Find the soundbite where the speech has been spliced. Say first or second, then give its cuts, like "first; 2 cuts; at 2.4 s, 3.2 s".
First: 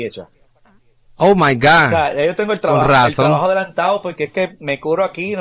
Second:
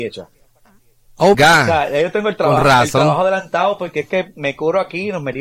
second; 1 cut; at 1.3 s